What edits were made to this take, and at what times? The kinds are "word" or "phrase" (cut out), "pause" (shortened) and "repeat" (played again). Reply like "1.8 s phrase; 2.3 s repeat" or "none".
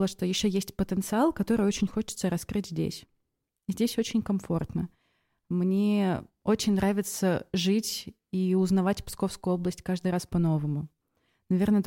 none